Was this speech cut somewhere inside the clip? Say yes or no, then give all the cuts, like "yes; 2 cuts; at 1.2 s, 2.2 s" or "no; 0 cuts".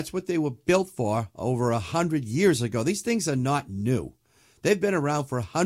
no; 0 cuts